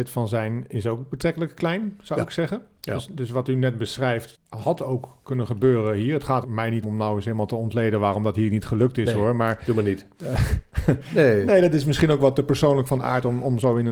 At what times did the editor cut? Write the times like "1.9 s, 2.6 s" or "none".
4.3 s, 6.4 s, 6.8 s

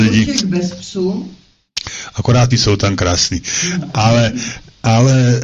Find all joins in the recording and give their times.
2.5 s

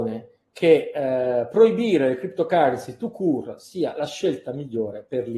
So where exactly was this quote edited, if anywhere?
none

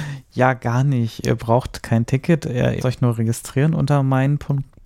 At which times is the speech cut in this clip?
2.8 s

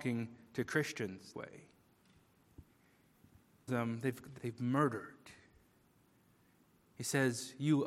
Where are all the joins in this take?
1.3 s, 3.7 s, 4.4 s

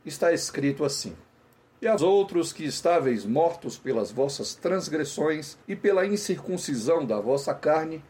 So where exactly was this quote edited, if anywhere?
1.6 s, 2.0 s, 5.6 s

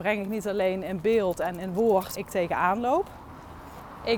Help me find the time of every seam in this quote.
2.2 s

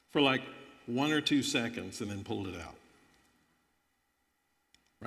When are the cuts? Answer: none

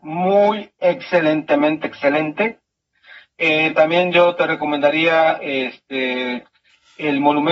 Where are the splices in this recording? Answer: none

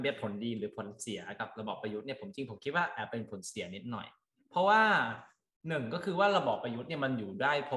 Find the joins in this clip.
none

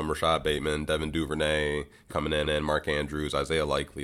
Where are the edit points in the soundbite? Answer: 2.1 s, 2.4 s

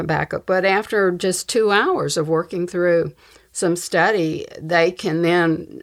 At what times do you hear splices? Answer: none

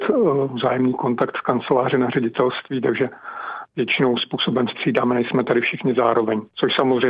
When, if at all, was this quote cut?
4.2 s

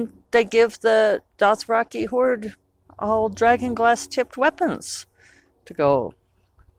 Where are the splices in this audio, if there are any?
none

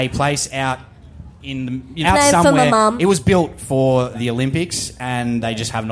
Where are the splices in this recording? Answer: 2.0 s, 4.1 s

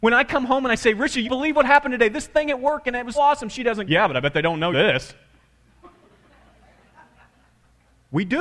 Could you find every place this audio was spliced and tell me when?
1.2 s, 3.1 s, 3.8 s, 4.7 s

